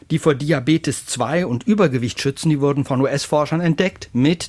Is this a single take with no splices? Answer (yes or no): yes